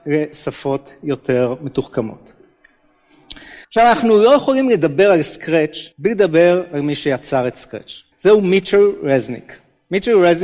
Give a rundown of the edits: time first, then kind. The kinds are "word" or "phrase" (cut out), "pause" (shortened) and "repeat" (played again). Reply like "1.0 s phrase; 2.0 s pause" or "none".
3.6 s pause; 5.9 s pause; 8.1 s pause

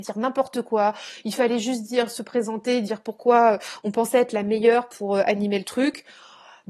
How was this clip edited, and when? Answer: none

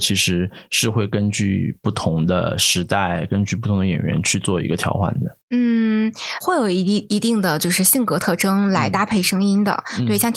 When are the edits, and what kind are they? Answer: 6.4 s word

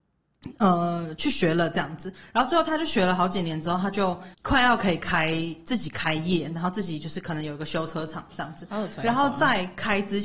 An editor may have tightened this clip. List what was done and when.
4.3 s pause

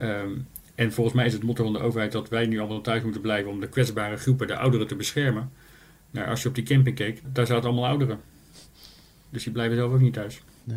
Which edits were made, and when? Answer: 7.2 s word

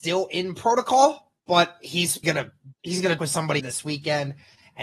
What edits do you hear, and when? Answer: 1.4 s pause; 2.2 s word; 2.7 s word; 3.2 s word; 3.6 s word

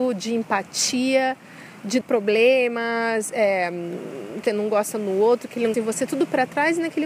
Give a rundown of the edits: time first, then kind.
2.0 s word; 4.5 s word; 5.7 s word

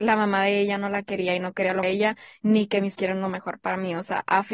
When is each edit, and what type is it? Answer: 1.8 s phrase; 3.0 s phrase

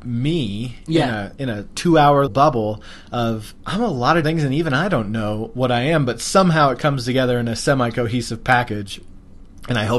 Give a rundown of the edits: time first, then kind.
2.3 s word; 4.2 s word

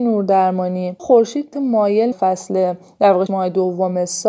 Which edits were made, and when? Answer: 1.0 s word; 1.5 s word; 2.1 s word; 3.3 s word

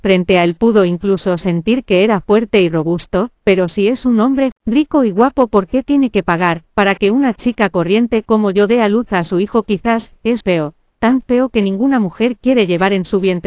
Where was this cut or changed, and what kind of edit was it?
4.5 s word; 10.4 s word

